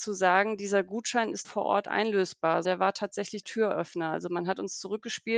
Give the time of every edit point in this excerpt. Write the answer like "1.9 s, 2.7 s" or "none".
1.4 s, 2.6 s, 3.4 s